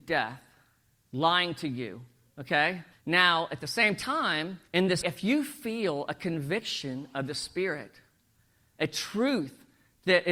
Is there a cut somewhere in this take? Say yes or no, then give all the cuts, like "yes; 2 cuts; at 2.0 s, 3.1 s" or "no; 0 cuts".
yes; 3 cuts; at 2.9 s, 4.7 s, 5.0 s